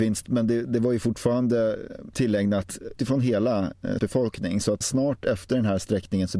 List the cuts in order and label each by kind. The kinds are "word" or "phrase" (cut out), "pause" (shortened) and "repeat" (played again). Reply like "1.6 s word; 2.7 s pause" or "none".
3.0 s word; 4.0 s word; 4.8 s word